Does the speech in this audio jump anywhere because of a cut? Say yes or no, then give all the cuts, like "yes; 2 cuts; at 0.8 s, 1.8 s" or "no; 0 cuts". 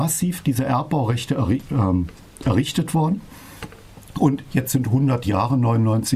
no; 0 cuts